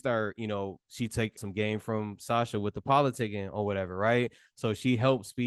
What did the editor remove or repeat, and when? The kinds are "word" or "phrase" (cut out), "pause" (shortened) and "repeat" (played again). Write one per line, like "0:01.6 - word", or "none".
0:01.4 - word